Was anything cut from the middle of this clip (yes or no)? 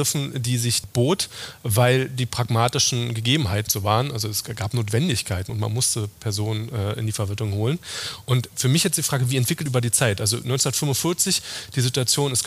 yes